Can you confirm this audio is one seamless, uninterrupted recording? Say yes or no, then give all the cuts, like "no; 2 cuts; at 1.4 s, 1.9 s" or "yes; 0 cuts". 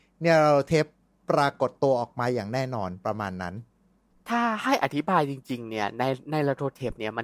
yes; 0 cuts